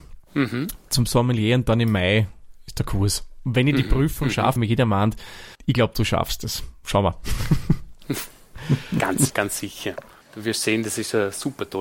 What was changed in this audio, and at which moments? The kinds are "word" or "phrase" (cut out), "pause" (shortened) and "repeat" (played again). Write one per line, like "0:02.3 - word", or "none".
0:04.6 - word
0:05.5 - pause
0:09.3 - word
0:10.2 - pause